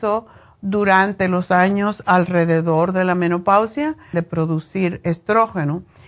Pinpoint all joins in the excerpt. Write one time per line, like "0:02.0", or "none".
0:04.1